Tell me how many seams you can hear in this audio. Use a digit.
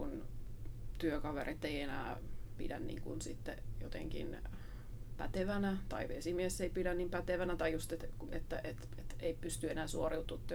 0